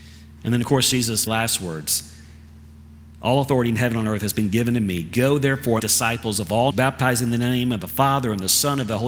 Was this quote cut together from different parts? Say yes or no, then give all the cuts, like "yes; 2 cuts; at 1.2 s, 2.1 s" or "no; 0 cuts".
yes; 3 cuts; at 1.3 s, 5.8 s, 6.7 s